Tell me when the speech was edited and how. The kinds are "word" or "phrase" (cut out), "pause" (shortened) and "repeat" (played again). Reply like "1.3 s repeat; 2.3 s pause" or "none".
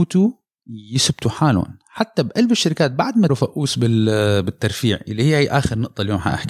3.3 s phrase